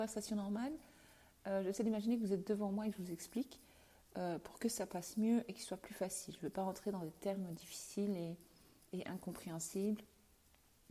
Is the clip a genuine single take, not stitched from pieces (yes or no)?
yes